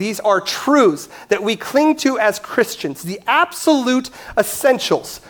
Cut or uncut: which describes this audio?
uncut